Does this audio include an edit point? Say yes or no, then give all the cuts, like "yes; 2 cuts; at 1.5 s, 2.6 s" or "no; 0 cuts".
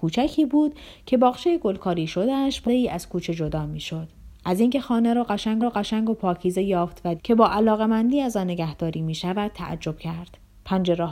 yes; 3 cuts; at 2.7 s, 5.6 s, 7.2 s